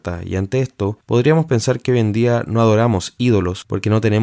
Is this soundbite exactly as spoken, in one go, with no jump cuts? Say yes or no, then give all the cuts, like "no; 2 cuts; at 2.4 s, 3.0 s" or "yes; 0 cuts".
yes; 0 cuts